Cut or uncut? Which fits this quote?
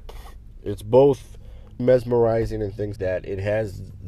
cut